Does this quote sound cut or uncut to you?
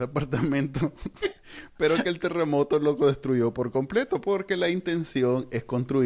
uncut